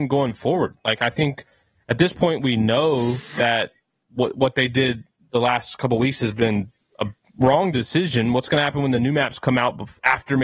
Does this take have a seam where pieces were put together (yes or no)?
no